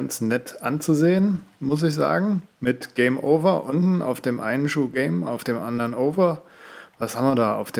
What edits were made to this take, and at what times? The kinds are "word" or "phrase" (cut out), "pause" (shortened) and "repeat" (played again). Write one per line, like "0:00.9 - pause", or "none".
0:02.5 - pause